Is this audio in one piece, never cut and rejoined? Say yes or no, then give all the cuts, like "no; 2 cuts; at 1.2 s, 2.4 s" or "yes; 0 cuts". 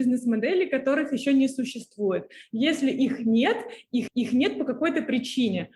no; 1 cut; at 4.1 s